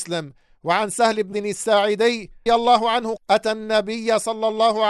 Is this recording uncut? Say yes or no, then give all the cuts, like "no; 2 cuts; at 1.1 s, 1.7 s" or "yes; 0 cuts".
no; 3 cuts; at 1.3 s, 2.5 s, 3.2 s